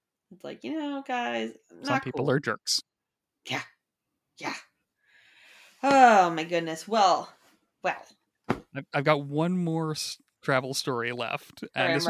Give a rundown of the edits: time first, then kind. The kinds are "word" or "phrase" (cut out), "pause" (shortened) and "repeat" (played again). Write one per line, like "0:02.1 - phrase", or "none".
none